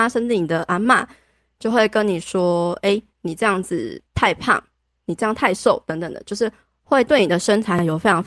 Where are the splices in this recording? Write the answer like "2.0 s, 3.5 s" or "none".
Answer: 3.1 s, 4.1 s